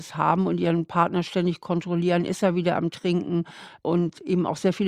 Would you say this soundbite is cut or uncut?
uncut